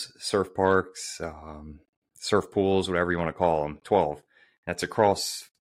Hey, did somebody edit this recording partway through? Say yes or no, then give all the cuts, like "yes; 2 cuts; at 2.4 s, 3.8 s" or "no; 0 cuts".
no; 0 cuts